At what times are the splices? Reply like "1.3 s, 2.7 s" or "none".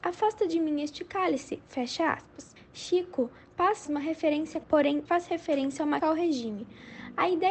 2.6 s, 3.9 s, 4.6 s, 5.1 s, 6.0 s